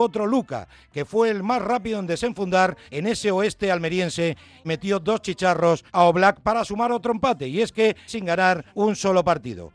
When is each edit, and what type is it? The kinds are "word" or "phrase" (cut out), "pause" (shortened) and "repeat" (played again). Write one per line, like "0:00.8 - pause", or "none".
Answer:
0:02.9 - pause
0:04.6 - phrase
0:05.9 - pause
0:08.1 - phrase
0:08.7 - pause